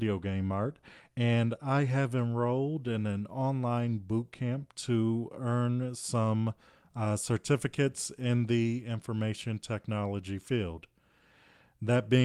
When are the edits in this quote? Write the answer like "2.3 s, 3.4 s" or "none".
none